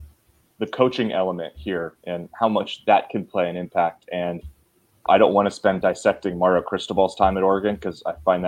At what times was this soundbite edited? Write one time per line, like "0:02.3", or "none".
0:05.1
0:05.8